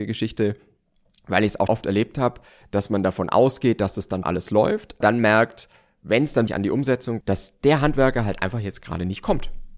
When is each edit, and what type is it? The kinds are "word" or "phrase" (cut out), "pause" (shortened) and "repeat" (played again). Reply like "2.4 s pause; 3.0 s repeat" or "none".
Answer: 1.7 s word; 4.2 s word; 5.0 s word; 6.5 s word; 7.2 s word